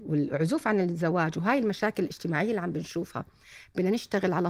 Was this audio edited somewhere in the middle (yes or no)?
no